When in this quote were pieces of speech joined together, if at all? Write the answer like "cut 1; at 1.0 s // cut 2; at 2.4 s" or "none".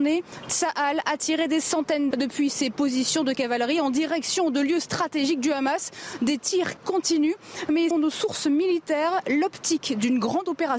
cut 1; at 2.1 s // cut 2; at 6.8 s // cut 3; at 7.9 s